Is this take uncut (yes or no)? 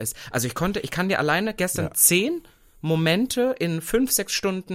yes